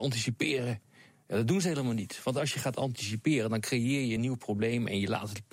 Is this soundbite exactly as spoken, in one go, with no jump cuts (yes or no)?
yes